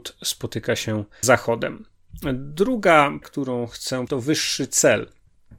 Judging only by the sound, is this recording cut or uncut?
cut